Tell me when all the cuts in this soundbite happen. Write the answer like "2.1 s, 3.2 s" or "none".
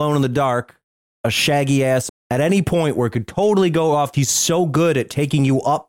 2.1 s, 4.1 s

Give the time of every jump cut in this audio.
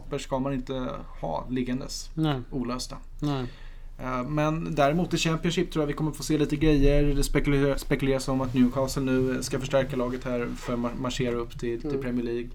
none

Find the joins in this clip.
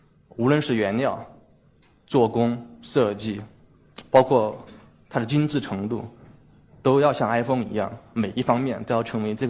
none

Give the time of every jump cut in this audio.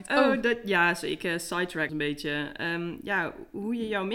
1.9 s

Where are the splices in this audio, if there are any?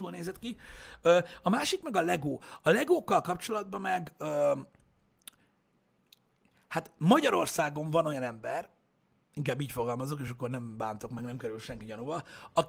none

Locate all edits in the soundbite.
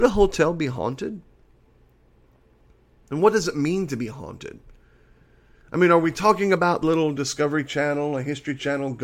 6.8 s

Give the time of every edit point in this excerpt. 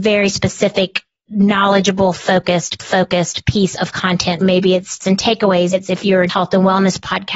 2.8 s, 4.4 s, 5.0 s, 5.7 s, 6.3 s

